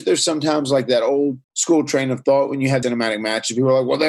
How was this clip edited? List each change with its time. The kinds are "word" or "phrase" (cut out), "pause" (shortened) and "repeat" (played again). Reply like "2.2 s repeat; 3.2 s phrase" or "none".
1.4 s pause; 2.8 s word